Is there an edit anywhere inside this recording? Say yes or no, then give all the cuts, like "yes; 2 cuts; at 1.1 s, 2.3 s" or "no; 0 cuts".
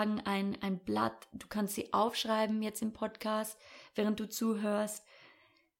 no; 0 cuts